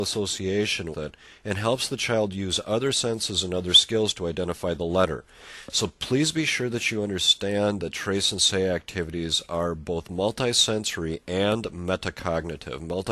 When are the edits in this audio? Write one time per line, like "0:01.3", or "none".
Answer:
0:00.9